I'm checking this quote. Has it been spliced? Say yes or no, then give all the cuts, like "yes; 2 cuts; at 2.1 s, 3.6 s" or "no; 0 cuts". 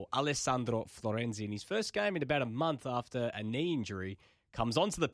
no; 0 cuts